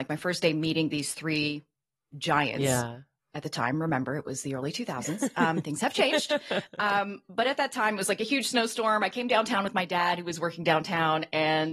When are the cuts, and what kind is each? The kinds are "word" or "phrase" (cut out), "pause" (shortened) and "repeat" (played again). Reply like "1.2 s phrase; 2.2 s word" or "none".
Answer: none